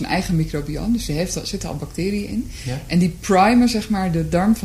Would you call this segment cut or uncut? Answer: uncut